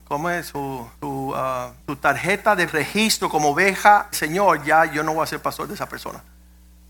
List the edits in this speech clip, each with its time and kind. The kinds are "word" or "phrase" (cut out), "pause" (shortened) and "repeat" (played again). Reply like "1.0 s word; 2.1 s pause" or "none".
0.9 s pause; 1.8 s pause; 2.7 s word; 4.1 s word

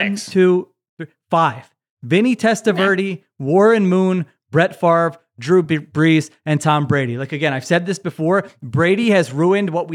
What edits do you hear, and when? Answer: none

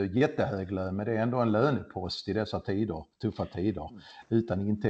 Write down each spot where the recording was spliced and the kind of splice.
3.1 s pause

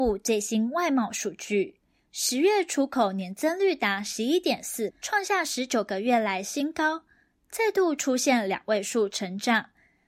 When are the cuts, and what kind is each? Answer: 4.9 s word

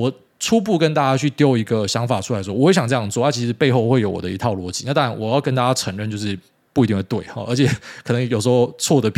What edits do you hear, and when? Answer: none

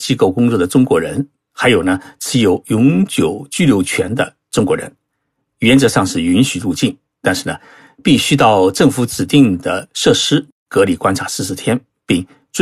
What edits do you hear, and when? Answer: none

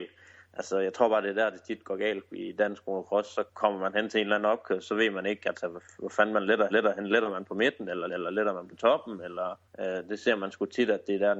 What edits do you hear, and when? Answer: 3.5 s pause; 6.7 s repeat; 8.1 s repeat; 9.7 s pause

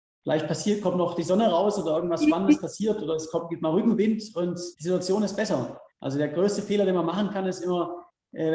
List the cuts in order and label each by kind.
4.7 s word; 5.9 s pause

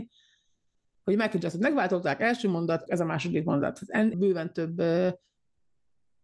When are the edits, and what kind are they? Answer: 2.9 s word; 4.1 s word

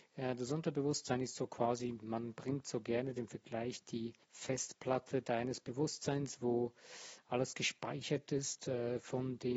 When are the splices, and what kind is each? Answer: 4.2 s pause

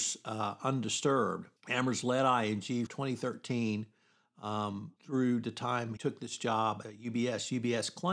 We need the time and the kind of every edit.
1.6 s pause; 2.9 s word; 5.0 s pause; 6.0 s word; 6.8 s word

